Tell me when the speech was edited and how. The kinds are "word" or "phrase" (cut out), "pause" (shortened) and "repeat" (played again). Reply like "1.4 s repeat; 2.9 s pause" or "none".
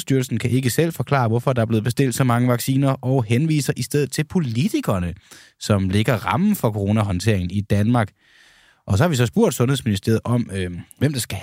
none